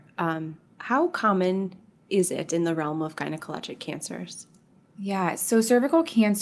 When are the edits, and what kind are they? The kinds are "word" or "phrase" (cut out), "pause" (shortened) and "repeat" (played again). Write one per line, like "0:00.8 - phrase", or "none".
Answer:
none